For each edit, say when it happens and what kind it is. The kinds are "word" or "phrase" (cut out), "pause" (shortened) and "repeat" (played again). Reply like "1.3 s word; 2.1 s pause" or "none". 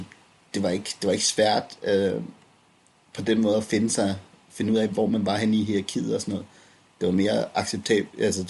none